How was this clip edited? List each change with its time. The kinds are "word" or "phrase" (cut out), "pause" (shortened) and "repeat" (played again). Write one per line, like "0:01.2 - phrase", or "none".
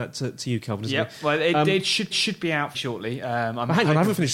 0:02.1 - repeat
0:02.7 - word